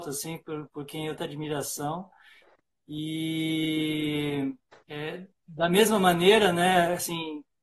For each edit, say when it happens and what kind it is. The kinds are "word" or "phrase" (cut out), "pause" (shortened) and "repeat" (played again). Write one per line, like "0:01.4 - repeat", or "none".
0:01.2 - phrase
0:04.7 - pause